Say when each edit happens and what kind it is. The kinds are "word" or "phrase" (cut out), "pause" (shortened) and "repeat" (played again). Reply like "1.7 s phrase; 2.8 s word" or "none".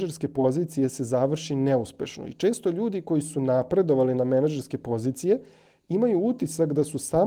none